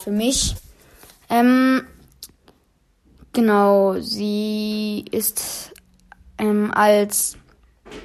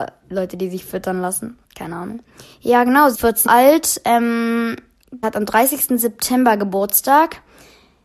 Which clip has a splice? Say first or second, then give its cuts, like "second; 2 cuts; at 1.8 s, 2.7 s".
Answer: second; 4 cuts; at 2.5 s, 3.1 s, 3.5 s, 5.2 s